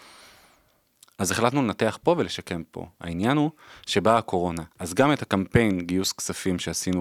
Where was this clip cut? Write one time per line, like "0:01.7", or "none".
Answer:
0:04.7